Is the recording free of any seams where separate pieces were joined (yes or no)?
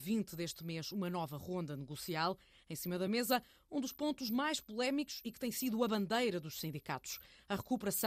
yes